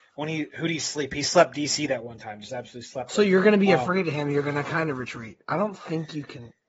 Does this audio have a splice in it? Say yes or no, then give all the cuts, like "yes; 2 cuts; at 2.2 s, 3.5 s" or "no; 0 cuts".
no; 0 cuts